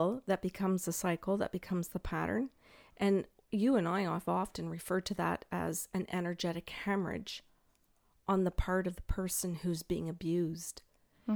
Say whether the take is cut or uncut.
uncut